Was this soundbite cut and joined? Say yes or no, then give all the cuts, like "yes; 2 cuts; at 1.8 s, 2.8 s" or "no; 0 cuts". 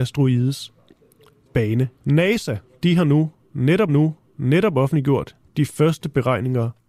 yes; 2 cuts; at 1.9 s, 3.9 s